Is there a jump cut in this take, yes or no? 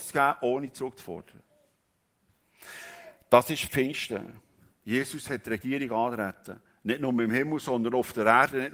no